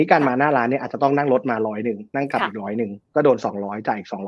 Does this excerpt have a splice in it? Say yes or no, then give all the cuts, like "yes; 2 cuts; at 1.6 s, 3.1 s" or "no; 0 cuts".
yes; 1 cut; at 2.1 s